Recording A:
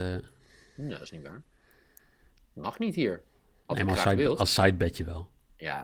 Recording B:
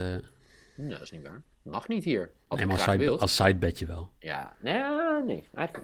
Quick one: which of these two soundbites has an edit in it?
B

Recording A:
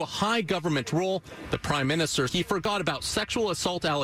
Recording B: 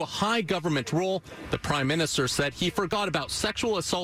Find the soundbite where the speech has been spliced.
A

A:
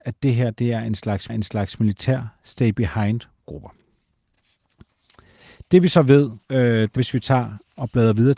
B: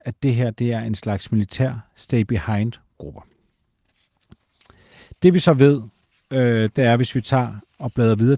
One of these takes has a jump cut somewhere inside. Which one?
A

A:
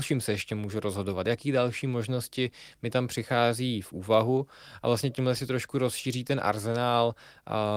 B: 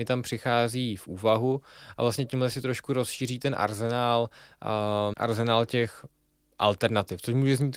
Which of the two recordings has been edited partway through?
B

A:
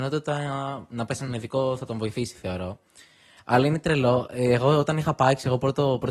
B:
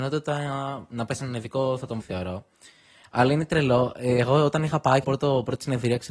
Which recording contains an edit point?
B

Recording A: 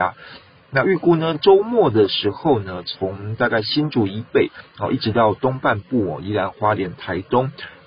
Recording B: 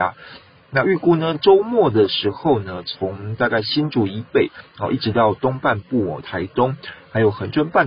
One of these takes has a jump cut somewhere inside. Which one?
B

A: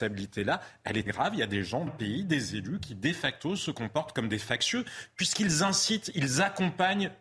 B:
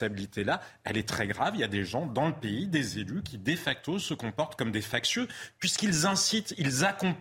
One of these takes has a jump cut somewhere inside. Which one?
A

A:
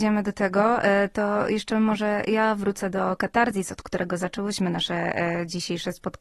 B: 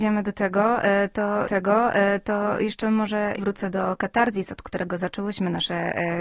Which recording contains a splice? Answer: B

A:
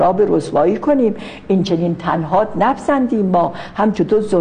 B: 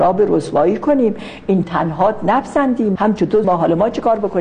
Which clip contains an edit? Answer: B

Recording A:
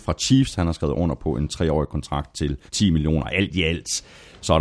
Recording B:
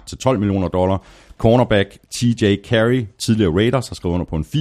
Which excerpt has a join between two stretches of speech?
A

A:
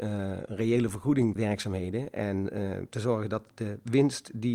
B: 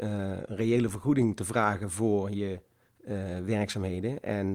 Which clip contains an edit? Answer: A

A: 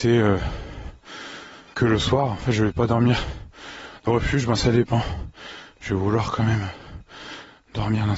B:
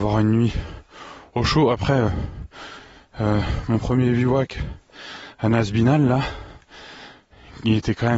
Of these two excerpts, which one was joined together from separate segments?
A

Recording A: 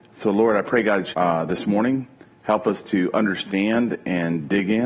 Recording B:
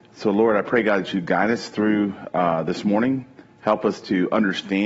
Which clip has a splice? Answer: A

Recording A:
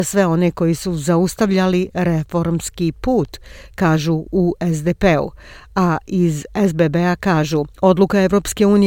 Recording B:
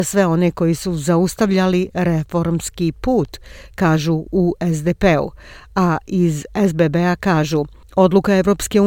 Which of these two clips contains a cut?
A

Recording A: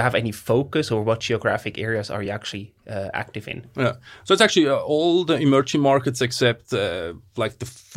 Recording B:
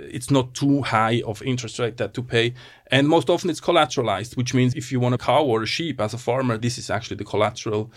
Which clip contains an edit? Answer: B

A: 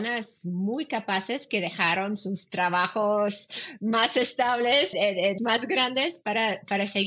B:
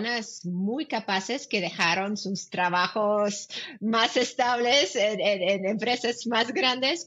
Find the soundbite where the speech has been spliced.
A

